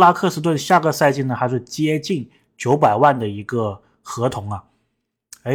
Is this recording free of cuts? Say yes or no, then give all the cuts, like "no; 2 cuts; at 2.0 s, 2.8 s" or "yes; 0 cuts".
yes; 0 cuts